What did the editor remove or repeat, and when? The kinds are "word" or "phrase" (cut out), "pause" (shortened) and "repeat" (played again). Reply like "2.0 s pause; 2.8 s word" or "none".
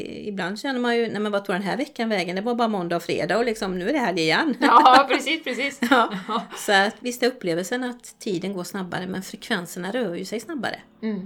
7.0 s word